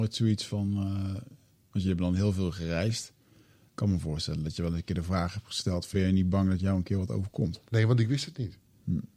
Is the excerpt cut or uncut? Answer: cut